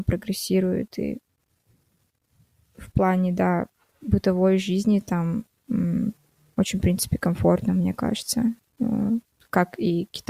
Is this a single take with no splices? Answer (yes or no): no